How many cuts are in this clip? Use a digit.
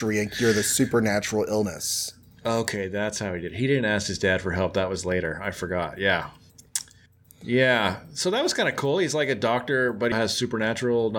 1